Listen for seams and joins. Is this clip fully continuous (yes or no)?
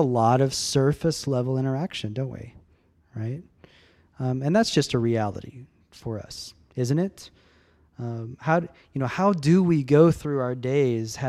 yes